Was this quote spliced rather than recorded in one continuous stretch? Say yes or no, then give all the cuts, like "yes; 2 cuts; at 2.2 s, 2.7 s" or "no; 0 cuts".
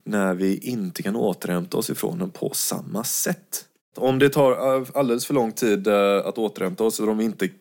no; 0 cuts